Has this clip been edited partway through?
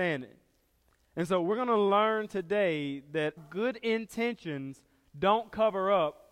yes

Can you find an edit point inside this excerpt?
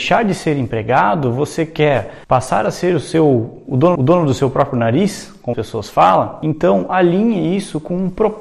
yes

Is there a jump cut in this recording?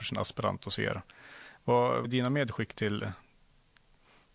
yes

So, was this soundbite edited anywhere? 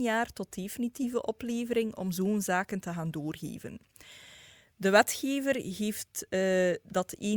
no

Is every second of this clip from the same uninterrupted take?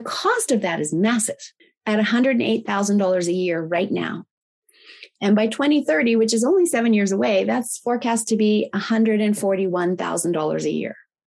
no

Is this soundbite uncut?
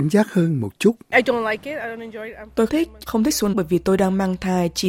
no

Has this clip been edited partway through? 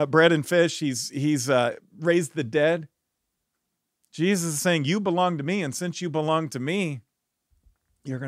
no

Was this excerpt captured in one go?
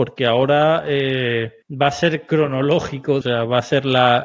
no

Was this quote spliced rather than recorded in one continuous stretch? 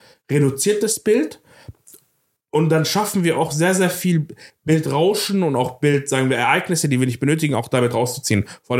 no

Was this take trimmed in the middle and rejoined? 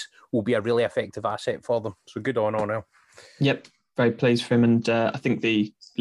no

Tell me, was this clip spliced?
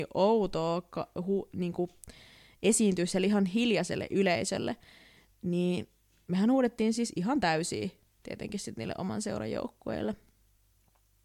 no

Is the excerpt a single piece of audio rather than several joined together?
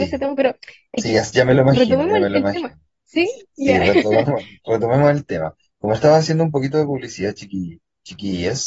yes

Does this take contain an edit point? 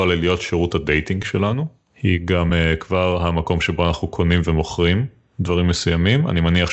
no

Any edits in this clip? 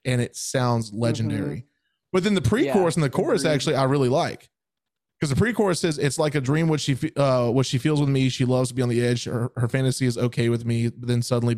no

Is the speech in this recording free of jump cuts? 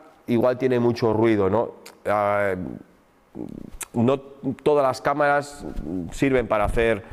yes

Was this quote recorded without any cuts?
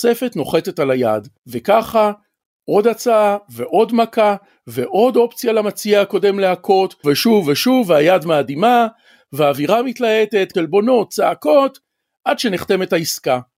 no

